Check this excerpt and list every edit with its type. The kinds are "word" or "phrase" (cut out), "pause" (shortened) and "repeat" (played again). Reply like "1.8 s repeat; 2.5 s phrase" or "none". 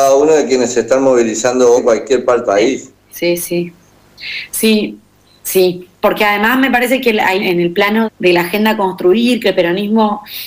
1.8 s word; 2.4 s word; 7.4 s word; 8.0 s word